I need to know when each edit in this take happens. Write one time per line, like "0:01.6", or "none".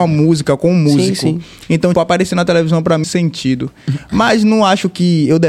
0:01.9
0:03.0